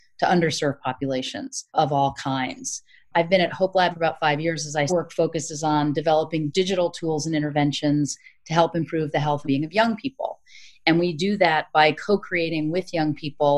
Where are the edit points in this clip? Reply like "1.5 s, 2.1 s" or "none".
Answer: 1.7 s, 3.9 s, 4.9 s, 9.4 s